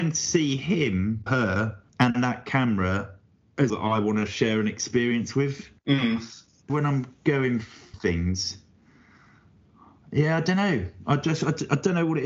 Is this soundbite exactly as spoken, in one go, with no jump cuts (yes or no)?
no